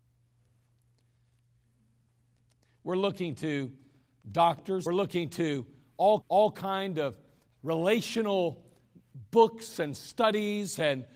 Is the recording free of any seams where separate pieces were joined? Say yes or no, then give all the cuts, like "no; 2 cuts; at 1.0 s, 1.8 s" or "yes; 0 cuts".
no; 3 cuts; at 4.9 s, 6.2 s, 7.5 s